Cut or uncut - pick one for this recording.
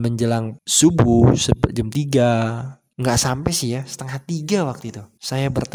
uncut